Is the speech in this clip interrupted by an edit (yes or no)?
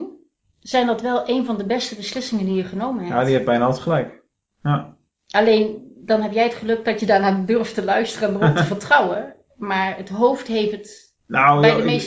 no